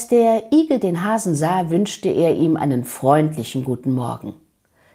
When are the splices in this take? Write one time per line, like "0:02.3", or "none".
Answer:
none